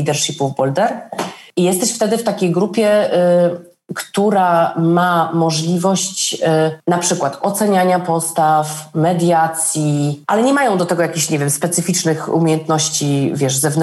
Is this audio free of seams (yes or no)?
yes